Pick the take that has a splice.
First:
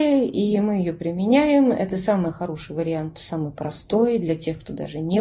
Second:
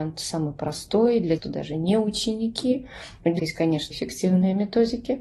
second; 3 cuts; at 1.4 s, 3.4 s, 3.9 s

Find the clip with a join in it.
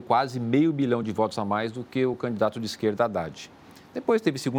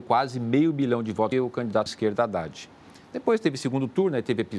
second; 2 cuts; at 1.3 s, 1.9 s

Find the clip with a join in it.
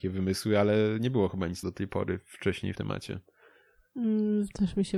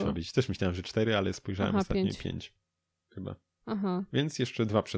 first; 2 cuts; at 1.6 s, 2.7 s

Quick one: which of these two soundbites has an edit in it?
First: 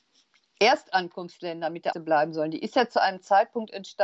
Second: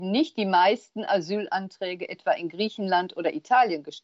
first; 1 cut; at 1.9 s

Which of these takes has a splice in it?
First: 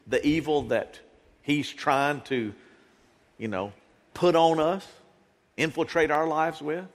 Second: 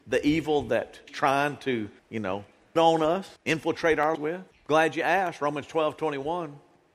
second; 6 cuts; at 1.1 s, 2.0 s, 2.8 s, 3.4 s, 4.1 s, 4.5 s

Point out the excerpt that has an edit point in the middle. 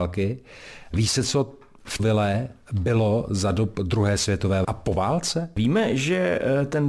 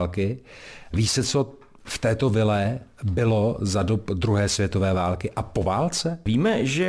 first; 2 cuts; at 2.0 s, 4.6 s

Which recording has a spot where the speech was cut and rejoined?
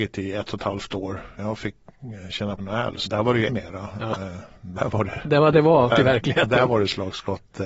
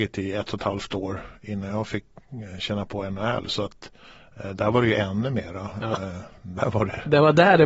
first; 6 cuts; at 1.4 s, 2.6 s, 3.1 s, 3.5 s, 5.5 s, 5.9 s

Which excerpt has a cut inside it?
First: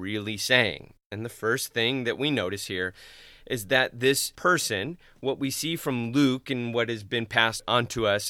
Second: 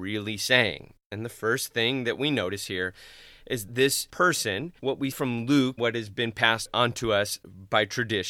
second; 4 cuts; at 3.7 s, 4.8 s, 5.1 s, 5.8 s

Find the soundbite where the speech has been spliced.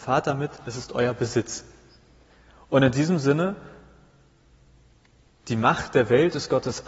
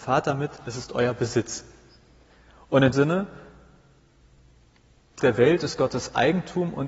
second; 2 cuts; at 2.9 s, 5.2 s

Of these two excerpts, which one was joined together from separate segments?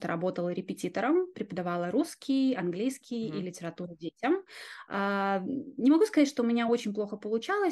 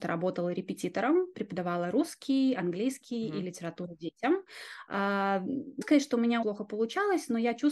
second; 2 cuts; at 5.8 s, 6.4 s

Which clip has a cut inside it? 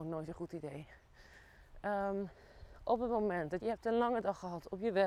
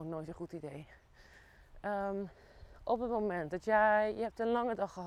first; 1 cut; at 3.6 s

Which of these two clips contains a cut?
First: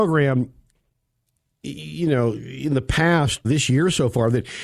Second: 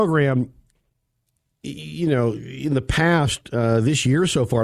first; 1 cut; at 3.4 s

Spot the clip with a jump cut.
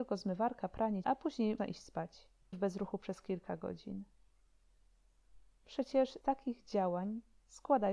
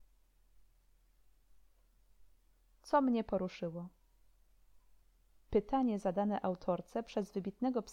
first; 4 cuts; at 1.0 s, 1.6 s, 2.5 s, 6.2 s

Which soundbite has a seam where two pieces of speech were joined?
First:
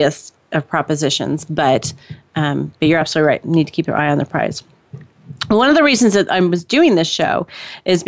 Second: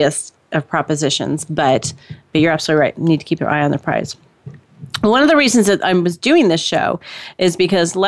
second; 1 cut; at 2.3 s

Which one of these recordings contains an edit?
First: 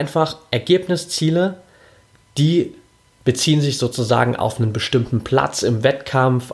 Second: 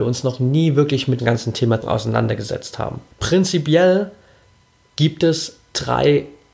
second; 3 cuts; at 1.2 s, 1.8 s, 3.1 s

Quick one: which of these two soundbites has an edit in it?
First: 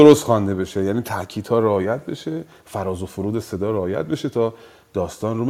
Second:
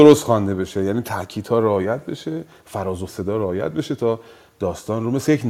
second; 1 cut; at 3.1 s

